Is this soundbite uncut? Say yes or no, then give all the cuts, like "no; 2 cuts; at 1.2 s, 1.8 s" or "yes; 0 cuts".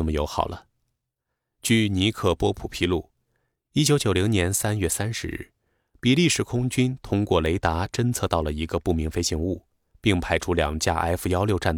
yes; 0 cuts